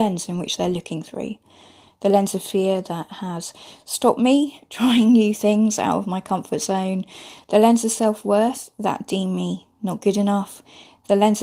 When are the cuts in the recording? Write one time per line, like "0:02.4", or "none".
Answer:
none